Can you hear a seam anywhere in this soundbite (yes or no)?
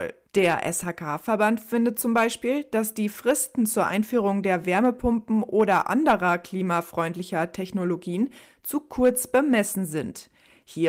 no